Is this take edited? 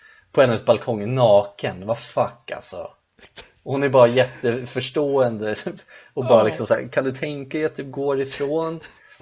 no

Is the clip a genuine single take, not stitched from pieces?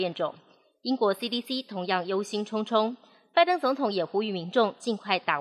yes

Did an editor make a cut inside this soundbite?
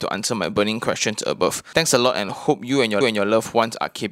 yes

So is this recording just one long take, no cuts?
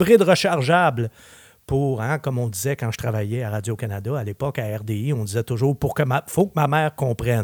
yes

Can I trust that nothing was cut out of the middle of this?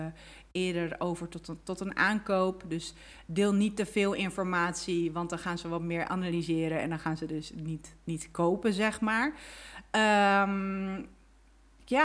yes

